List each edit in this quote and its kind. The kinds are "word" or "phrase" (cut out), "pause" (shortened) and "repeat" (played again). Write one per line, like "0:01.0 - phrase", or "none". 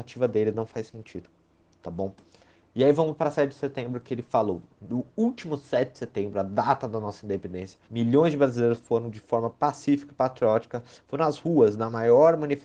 0:07.8 - pause